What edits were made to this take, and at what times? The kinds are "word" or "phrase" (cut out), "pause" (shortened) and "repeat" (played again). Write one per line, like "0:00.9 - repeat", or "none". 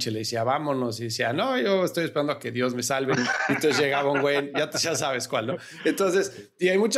none